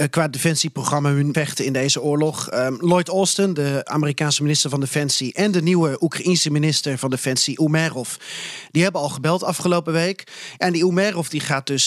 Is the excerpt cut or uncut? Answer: cut